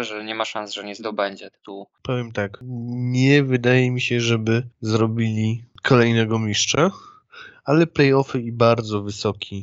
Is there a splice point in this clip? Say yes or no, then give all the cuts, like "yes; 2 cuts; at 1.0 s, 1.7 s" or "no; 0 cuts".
no; 0 cuts